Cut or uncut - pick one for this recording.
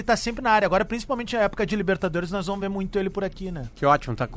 uncut